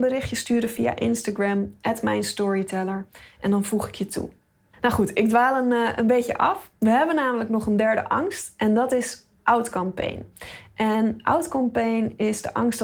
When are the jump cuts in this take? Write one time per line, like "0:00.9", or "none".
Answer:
none